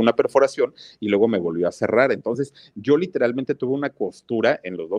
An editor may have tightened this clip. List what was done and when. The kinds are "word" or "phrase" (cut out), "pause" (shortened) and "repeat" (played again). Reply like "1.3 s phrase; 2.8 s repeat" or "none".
none